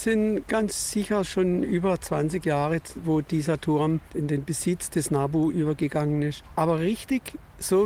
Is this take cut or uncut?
uncut